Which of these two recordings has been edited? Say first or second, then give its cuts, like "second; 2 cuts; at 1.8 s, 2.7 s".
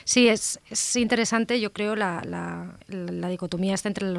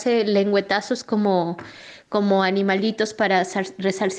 first; 1 cut; at 2.8 s